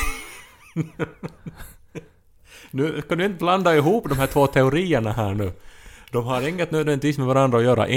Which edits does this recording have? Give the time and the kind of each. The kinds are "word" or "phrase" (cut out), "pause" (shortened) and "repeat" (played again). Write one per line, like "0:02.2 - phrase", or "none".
none